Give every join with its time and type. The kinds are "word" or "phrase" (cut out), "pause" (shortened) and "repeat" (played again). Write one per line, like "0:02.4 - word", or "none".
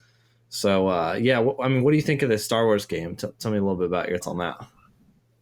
0:04.2 - word